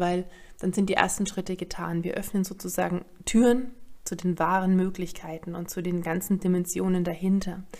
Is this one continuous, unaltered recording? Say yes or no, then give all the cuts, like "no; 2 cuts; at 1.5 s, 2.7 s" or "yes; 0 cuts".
yes; 0 cuts